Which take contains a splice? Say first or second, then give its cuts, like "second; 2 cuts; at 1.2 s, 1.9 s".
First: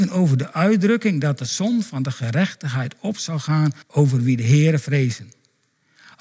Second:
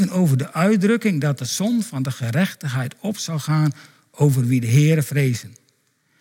first; 1 cut; at 3.8 s